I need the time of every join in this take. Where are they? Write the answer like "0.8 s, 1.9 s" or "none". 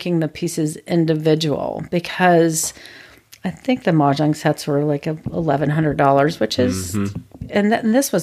none

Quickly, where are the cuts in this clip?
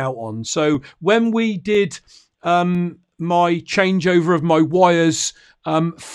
none

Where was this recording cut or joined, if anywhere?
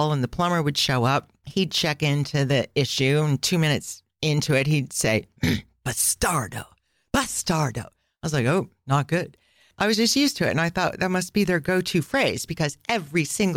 none

